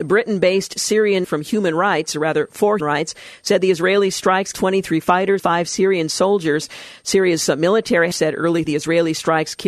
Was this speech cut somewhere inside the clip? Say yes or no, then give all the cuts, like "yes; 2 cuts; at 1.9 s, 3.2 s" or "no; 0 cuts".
yes; 6 cuts; at 1.2 s, 2.8 s, 4.5 s, 5.4 s, 8.1 s, 8.6 s